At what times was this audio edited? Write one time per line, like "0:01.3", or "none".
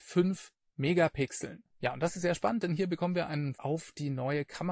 0:03.5